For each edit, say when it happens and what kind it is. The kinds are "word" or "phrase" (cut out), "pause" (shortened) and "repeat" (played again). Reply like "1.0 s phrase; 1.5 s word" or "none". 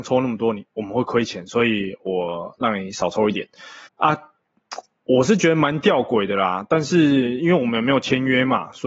3.9 s pause